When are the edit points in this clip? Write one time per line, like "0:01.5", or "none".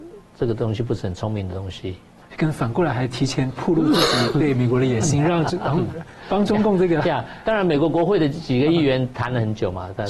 0:02.2